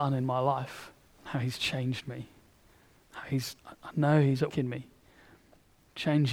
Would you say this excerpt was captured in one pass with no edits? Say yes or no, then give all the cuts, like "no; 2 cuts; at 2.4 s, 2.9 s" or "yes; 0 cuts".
no; 3 cuts; at 1.0 s, 3.6 s, 4.5 s